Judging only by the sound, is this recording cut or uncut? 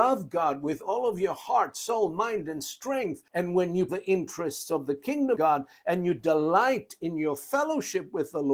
cut